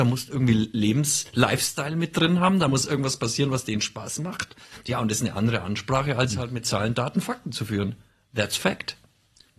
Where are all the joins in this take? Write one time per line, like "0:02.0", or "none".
none